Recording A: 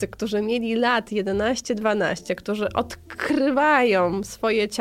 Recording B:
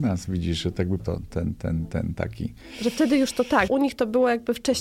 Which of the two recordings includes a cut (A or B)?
B